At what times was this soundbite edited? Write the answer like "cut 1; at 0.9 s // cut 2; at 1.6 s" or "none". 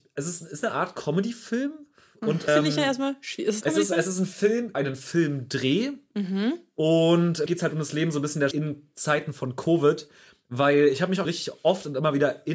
cut 1; at 2.5 s // cut 2; at 3.6 s // cut 3; at 4.7 s // cut 4; at 7.5 s // cut 5; at 8.5 s // cut 6; at 11.2 s